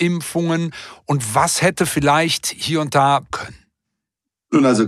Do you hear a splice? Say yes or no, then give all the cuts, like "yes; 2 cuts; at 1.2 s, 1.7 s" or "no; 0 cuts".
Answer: yes; 1 cut; at 3.3 s